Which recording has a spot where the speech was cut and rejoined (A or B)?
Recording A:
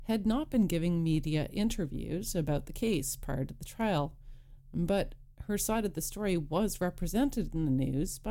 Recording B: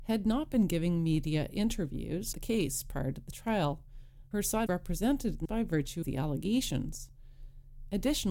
B